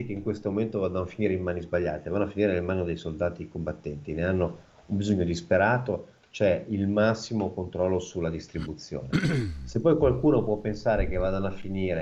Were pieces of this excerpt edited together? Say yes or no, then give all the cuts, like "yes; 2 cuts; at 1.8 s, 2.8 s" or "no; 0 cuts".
no; 0 cuts